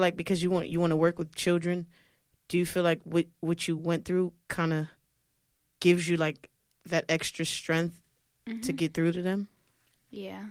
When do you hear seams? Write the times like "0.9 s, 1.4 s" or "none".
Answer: none